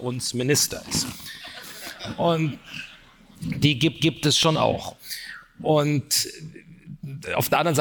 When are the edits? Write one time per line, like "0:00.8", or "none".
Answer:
0:04.0